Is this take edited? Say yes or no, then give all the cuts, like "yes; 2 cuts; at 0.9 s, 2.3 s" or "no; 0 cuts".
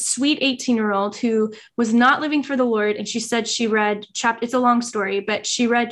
no; 0 cuts